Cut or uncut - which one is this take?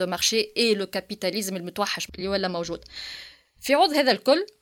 uncut